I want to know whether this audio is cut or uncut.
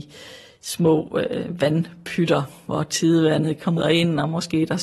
cut